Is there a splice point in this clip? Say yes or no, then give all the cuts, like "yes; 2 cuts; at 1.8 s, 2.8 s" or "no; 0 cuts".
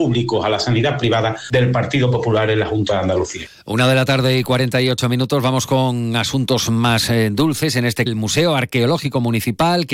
yes; 1 cut; at 8.1 s